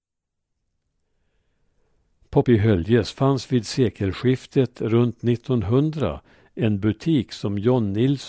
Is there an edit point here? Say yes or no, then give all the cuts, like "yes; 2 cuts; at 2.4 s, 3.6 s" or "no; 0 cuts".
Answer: yes; 1 cut; at 2.4 s